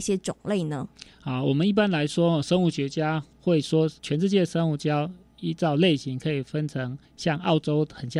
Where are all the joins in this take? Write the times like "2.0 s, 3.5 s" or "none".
3.3 s, 4.0 s, 7.0 s